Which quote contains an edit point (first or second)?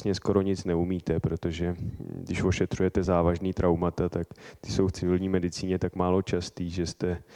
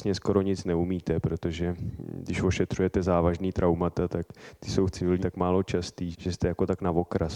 second